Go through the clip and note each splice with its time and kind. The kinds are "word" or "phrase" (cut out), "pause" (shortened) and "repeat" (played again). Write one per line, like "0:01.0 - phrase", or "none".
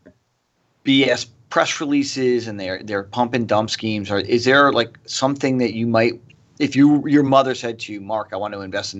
none